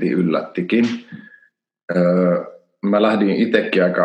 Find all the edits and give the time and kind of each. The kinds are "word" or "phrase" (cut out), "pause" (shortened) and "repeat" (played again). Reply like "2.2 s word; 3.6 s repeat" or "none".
none

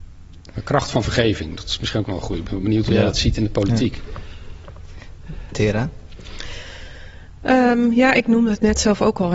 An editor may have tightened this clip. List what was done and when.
none

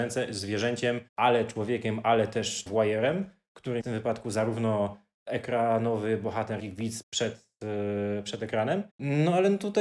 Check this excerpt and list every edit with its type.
1.1 s pause; 2.7 s word; 3.8 s word; 6.6 s word; 7.0 s word; 8.9 s pause

